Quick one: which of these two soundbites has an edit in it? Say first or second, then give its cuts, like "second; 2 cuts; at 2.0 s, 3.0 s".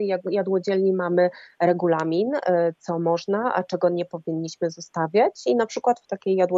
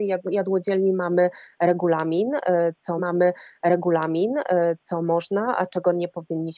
second; 1 cut; at 3.0 s